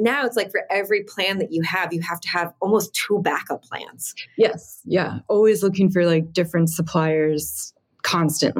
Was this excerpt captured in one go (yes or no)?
yes